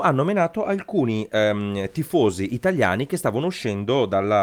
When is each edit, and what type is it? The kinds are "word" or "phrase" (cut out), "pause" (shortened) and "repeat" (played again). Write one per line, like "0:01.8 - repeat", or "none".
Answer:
none